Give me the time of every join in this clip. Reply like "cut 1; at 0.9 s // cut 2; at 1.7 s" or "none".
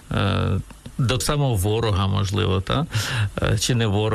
cut 1; at 1.2 s